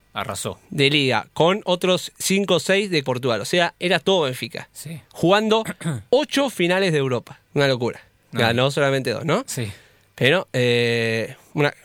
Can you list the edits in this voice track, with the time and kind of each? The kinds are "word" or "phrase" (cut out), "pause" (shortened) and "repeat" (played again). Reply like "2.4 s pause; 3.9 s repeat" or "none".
3.0 s word; 7.5 s pause